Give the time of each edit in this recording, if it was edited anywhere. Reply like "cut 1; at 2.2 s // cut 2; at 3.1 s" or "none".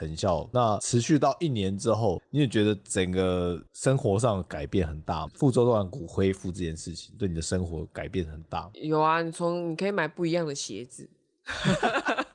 cut 1; at 3.7 s // cut 2; at 5.3 s // cut 3; at 8.7 s

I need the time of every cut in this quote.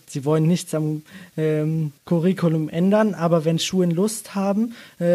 cut 1; at 2.0 s

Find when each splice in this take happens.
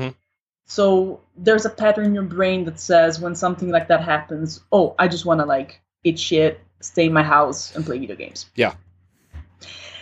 none

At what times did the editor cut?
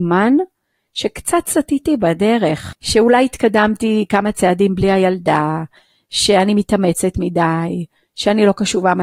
none

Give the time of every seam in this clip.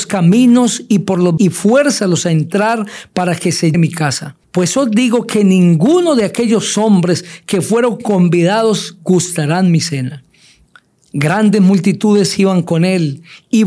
cut 1; at 1.4 s // cut 2; at 3.7 s // cut 3; at 4.4 s // cut 4; at 10.7 s

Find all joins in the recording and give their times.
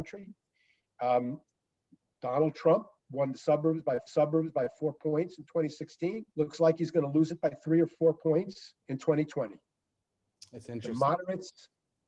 cut 1; at 4.1 s // cut 2; at 6.3 s // cut 3; at 8.8 s

